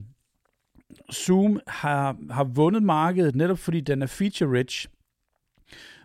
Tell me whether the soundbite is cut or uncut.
uncut